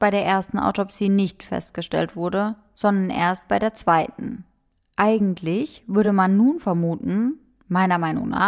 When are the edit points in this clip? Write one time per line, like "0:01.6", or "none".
none